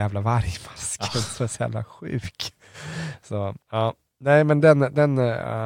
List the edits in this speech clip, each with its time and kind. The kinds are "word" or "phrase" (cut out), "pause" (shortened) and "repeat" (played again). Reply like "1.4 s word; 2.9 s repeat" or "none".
3.6 s pause